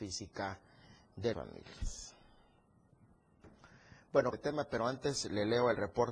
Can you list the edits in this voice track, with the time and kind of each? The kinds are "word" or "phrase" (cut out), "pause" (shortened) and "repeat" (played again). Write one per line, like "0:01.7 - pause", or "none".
0:01.3 - word
0:04.3 - phrase